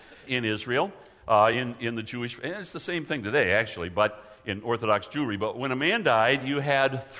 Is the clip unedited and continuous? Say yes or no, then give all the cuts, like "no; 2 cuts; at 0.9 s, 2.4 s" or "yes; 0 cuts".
yes; 0 cuts